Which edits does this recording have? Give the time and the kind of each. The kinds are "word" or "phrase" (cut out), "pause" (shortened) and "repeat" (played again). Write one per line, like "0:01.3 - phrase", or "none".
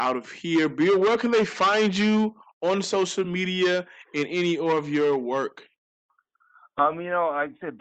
none